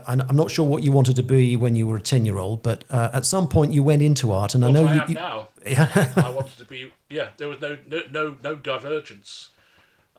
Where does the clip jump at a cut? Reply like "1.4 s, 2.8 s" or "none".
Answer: 5.6 s